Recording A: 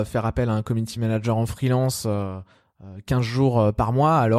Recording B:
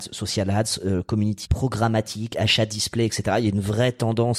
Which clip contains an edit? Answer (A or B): B